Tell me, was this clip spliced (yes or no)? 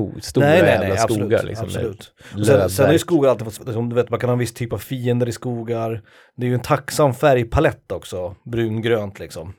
yes